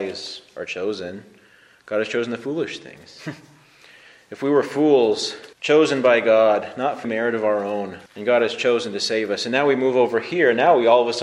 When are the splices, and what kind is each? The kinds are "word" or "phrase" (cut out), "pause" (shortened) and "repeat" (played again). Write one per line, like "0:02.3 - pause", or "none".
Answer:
0:05.5 - pause
0:07.0 - word
0:08.1 - pause